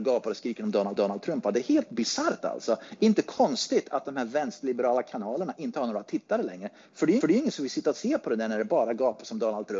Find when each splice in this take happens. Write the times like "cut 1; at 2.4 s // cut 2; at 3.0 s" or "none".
cut 1; at 1.0 s // cut 2; at 7.2 s